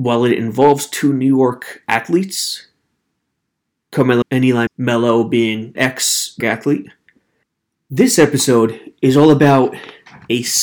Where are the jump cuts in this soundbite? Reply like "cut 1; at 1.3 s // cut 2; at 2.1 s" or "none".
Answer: cut 1; at 4.2 s // cut 2; at 4.7 s // cut 3; at 5.8 s // cut 4; at 6.4 s // cut 5; at 7.4 s